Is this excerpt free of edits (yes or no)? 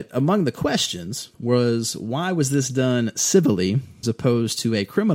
no